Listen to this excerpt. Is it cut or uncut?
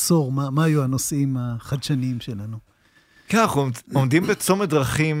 uncut